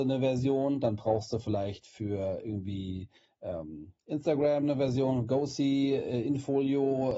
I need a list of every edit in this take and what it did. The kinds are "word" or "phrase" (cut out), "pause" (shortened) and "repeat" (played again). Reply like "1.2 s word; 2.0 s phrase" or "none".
none